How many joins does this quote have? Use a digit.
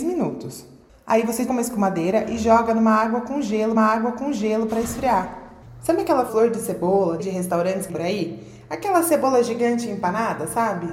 5